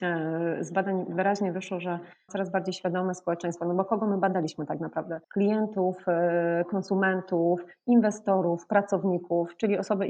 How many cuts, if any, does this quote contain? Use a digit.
2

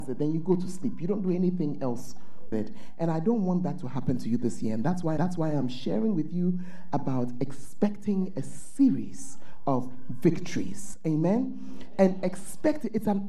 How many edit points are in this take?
2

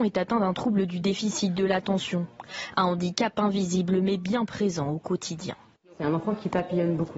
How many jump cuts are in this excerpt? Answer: 0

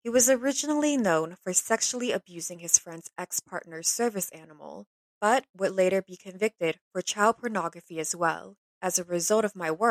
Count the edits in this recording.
0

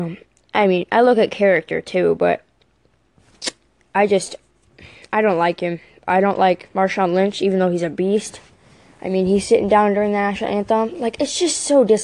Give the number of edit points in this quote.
0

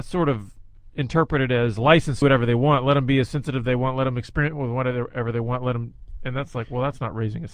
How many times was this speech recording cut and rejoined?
1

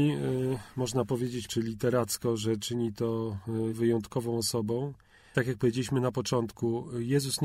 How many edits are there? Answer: 3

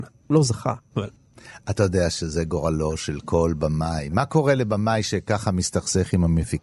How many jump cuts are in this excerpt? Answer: 0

